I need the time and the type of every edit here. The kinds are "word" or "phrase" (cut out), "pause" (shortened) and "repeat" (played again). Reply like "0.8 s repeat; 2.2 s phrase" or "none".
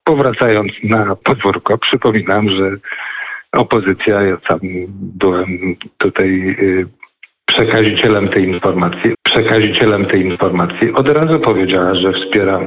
1.2 s word; 9.1 s repeat